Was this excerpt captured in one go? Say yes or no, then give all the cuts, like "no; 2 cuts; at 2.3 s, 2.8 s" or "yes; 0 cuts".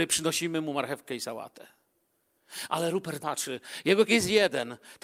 no; 2 cuts; at 3.2 s, 4.1 s